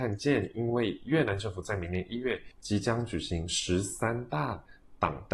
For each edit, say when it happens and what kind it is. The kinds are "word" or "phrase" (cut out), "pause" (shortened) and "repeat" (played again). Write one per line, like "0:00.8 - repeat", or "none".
0:02.5 - pause